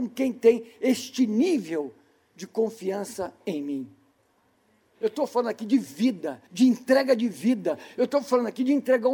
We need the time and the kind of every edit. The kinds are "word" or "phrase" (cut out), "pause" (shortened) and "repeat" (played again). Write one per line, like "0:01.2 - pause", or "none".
0:06.5 - pause